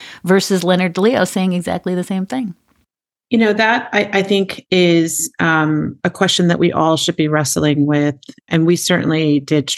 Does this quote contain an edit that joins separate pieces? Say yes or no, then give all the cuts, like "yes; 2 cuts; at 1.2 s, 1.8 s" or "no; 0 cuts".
no; 0 cuts